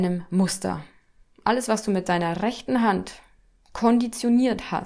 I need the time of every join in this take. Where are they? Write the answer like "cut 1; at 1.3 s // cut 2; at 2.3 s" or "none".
none